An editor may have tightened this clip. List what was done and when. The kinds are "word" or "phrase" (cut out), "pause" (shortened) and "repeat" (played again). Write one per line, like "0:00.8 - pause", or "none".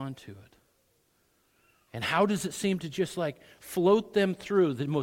none